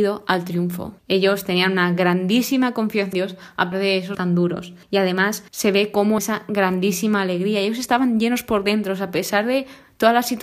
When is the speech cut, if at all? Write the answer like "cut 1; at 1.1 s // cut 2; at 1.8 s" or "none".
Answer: cut 1; at 1.0 s // cut 2; at 3.1 s // cut 3; at 3.7 s // cut 4; at 4.1 s // cut 5; at 4.8 s // cut 6; at 5.5 s // cut 7; at 6.2 s